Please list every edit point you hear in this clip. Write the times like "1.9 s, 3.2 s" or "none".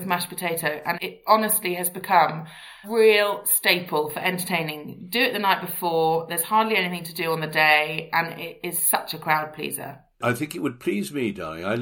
0.9 s, 2.8 s